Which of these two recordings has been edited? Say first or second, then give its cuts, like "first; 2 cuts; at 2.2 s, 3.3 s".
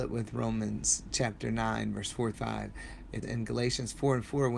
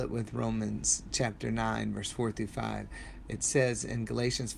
first; 2 cuts; at 2.3 s, 3.2 s